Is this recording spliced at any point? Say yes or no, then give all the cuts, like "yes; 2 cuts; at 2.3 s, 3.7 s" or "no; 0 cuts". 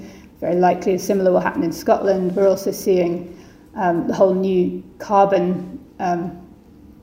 no; 0 cuts